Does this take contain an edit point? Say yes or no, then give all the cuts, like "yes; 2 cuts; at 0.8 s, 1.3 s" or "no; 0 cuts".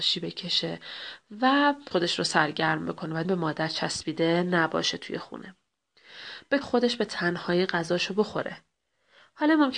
yes; 3 cuts; at 1.9 s, 3.2 s, 6.6 s